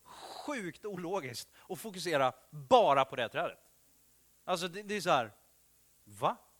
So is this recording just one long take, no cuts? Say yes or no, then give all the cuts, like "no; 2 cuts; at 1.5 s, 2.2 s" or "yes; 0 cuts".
yes; 0 cuts